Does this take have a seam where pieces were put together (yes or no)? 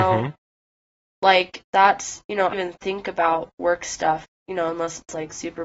yes